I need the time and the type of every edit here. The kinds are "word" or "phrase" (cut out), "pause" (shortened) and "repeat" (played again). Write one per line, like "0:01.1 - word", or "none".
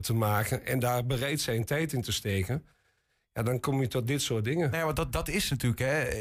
none